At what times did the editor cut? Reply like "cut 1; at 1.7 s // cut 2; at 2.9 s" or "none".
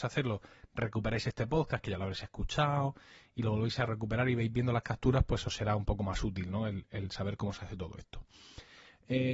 none